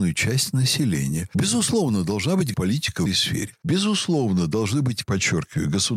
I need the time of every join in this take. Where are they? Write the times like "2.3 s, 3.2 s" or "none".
2.5 s, 3.1 s, 5.0 s